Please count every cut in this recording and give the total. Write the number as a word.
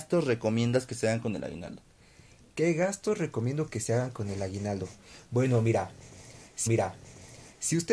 one